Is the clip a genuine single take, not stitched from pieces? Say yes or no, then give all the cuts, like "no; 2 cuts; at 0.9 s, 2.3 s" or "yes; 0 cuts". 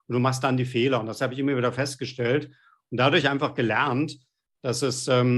yes; 0 cuts